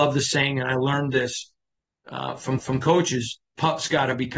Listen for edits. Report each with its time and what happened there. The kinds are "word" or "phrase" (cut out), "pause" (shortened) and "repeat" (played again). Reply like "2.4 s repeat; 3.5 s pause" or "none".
2.6 s repeat